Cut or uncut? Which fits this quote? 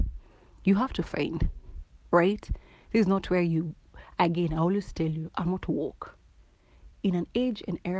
uncut